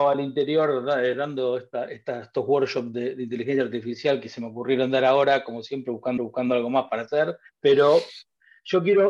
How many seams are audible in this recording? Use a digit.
2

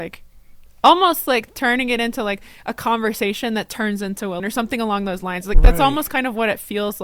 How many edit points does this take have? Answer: 1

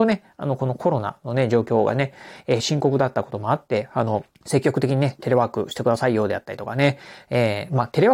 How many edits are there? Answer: 2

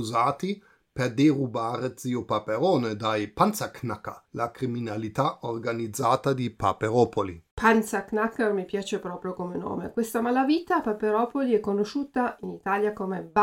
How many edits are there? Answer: 2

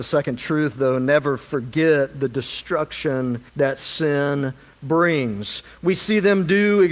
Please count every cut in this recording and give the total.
1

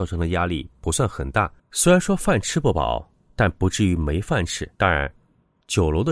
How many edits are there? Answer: 2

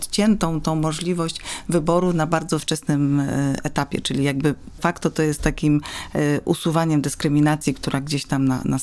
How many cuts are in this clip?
2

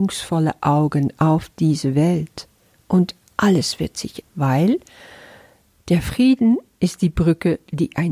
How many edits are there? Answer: 1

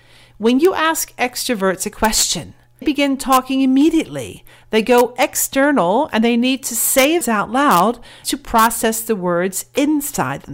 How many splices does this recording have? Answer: 3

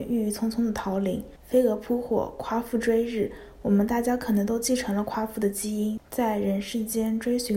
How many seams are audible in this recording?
1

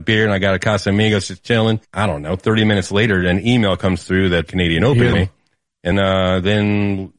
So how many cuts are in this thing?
3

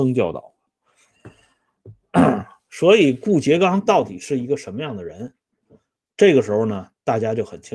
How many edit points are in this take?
0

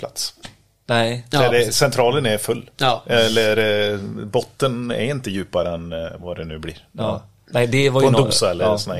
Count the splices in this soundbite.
0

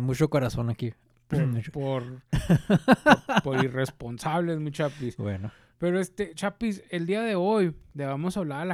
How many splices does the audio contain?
0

